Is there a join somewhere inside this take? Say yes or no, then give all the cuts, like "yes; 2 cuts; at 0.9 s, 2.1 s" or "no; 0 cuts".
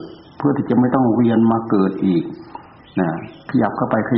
no; 0 cuts